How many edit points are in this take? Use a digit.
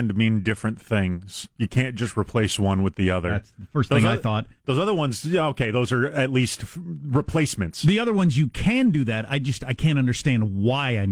2